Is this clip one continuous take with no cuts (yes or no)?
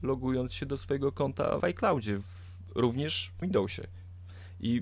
no